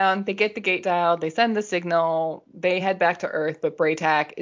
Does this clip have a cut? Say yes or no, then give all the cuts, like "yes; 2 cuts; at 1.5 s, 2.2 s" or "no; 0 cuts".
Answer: no; 0 cuts